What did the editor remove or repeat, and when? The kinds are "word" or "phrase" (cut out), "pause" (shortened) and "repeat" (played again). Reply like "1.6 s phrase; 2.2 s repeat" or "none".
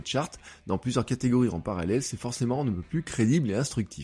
none